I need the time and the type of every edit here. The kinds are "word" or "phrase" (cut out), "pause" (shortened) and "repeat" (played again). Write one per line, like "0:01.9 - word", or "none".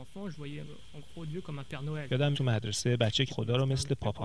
0:02.3 - word
0:03.3 - word

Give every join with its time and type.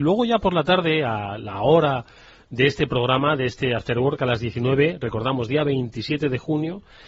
none

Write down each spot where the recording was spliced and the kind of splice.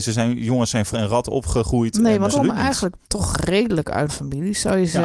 0:00.9 - word
0:02.3 - phrase
0:03.0 - pause
0:04.1 - word

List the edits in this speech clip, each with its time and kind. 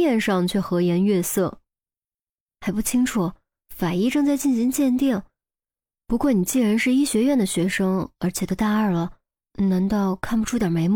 none

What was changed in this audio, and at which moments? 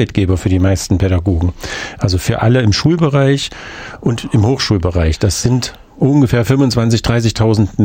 none

